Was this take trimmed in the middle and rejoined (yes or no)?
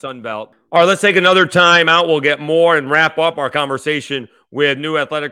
no